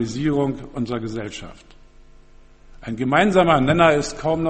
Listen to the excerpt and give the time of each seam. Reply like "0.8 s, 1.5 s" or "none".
none